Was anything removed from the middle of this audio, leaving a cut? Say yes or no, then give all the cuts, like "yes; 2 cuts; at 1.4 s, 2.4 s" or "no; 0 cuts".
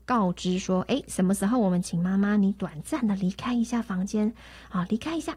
no; 0 cuts